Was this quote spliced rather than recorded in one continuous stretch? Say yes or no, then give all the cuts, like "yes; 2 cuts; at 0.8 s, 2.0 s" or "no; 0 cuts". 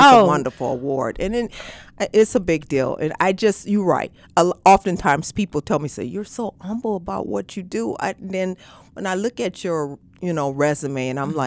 no; 0 cuts